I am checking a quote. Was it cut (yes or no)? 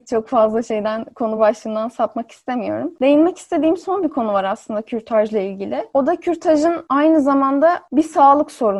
no